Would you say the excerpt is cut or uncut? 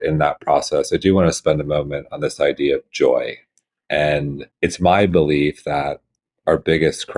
cut